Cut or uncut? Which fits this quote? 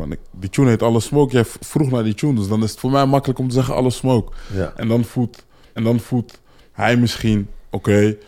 cut